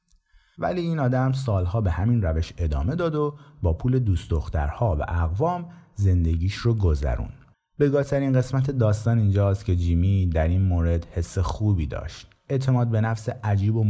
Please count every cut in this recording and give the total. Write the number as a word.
one